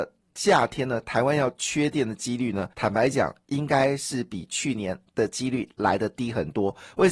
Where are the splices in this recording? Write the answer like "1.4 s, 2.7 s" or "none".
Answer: 2.7 s